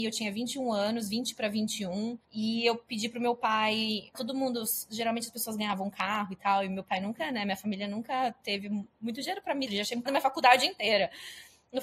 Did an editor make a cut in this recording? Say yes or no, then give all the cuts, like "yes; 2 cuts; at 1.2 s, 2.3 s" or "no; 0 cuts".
yes; 5 cuts; at 2.2 s, 4.1 s, 8.9 s, 9.7 s, 10.1 s